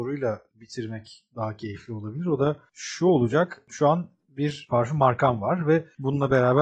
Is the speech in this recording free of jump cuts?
yes; 0 cuts

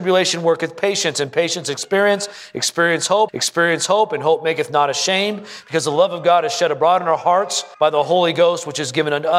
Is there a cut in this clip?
yes; 2 cuts; at 3.3 s, 7.7 s

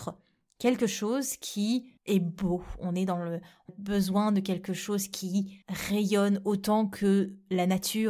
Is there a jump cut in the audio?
yes; 3 cuts; at 2.0 s, 3.7 s, 5.6 s

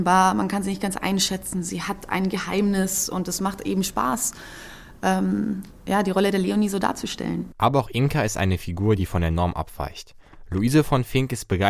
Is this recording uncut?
yes; 0 cuts

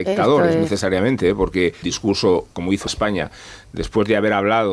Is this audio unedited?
no; 2 cuts; at 1.8 s, 2.9 s

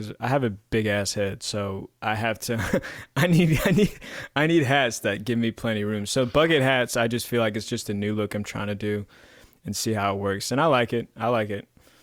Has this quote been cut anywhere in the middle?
no; 0 cuts

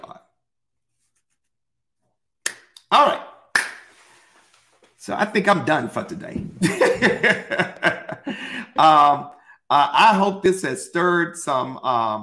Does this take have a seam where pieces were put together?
no; 0 cuts

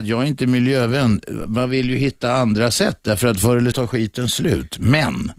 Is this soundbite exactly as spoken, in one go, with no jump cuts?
no; 1 cut; at 3.7 s

